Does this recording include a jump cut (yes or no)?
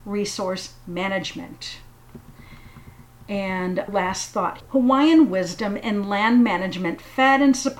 yes